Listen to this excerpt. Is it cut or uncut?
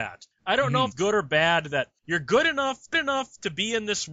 cut